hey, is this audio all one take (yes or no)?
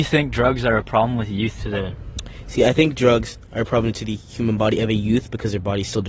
yes